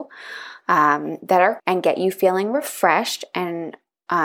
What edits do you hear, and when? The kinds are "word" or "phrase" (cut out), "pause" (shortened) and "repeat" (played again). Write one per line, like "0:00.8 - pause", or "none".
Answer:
0:01.6 - word